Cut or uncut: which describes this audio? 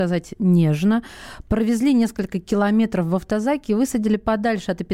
uncut